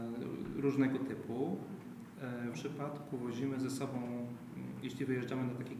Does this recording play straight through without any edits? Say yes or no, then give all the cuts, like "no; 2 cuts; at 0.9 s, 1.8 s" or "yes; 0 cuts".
no; 1 cut; at 2.5 s